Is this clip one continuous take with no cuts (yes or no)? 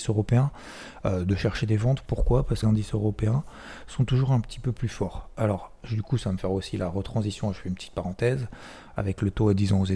no